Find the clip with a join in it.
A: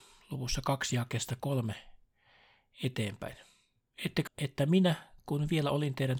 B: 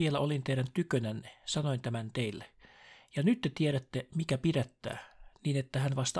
A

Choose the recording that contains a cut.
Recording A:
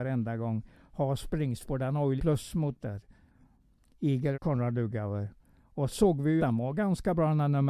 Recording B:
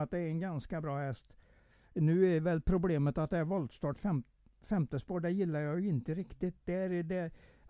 A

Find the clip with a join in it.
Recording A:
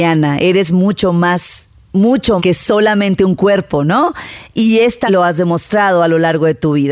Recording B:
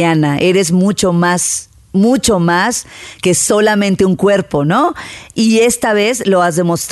A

